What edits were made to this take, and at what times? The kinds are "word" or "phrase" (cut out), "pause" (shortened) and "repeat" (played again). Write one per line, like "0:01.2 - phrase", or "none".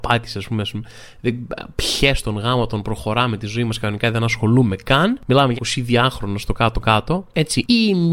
0:05.6 - word